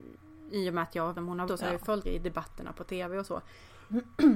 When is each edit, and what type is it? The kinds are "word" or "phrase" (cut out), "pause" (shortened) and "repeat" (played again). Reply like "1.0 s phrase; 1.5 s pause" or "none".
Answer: 1.1 s word; 1.5 s word; 2.0 s phrase